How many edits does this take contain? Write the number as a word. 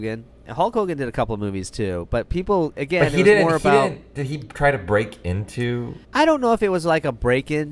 one